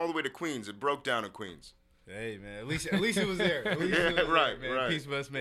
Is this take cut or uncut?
uncut